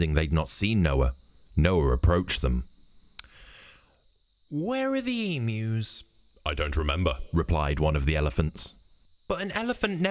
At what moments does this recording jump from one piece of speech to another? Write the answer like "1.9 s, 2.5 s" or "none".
none

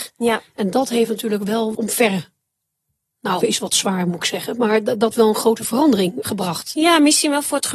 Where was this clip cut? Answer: 1.7 s, 3.4 s, 5.1 s, 6.2 s

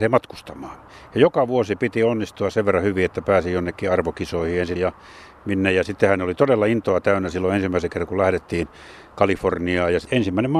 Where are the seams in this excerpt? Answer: 4.8 s

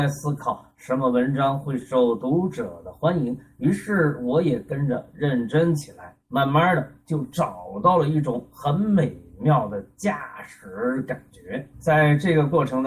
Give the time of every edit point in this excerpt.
6.2 s, 11.7 s

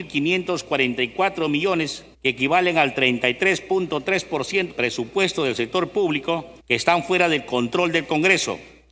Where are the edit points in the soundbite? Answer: 2.1 s, 4.7 s, 6.6 s

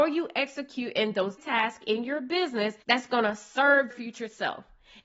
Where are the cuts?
1.4 s, 2.8 s, 3.9 s

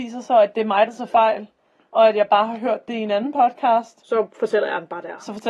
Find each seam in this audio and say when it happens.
none

